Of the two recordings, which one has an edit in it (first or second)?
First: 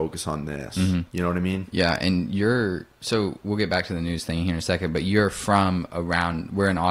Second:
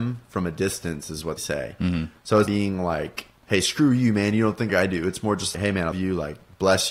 second